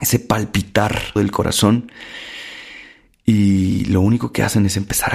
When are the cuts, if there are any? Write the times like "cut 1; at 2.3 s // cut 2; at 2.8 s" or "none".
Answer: cut 1; at 1.2 s